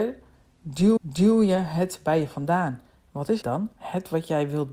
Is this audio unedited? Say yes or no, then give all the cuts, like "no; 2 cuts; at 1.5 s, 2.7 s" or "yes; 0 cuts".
no; 2 cuts; at 1.0 s, 3.4 s